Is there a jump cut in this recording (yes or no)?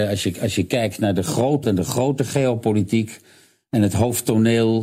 yes